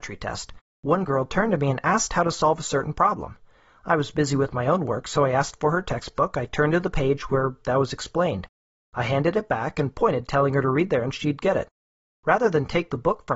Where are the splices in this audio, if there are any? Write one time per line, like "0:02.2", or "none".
none

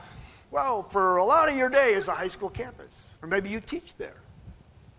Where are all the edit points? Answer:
0:03.2

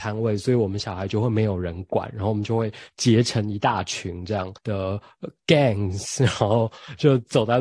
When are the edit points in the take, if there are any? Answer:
0:04.6

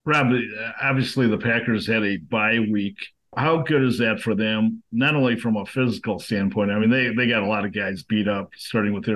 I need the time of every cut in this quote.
none

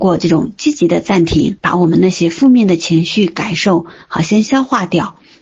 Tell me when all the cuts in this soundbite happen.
0:01.6

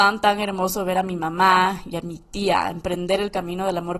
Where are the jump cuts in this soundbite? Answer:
none

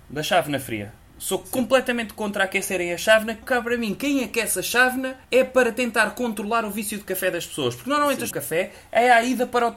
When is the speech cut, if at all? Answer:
0:03.4
0:05.2
0:08.3

